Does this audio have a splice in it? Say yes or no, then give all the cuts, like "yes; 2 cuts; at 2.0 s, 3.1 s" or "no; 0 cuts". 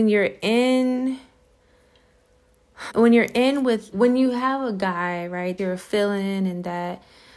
yes; 3 cuts; at 2.9 s, 3.9 s, 5.6 s